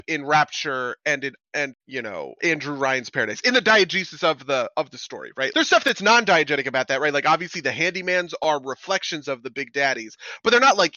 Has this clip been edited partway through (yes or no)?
yes